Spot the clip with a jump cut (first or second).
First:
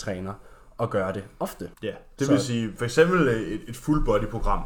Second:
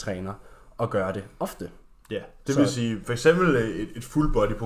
first